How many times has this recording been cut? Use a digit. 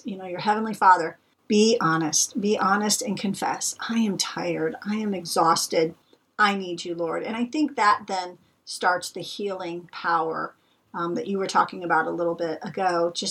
0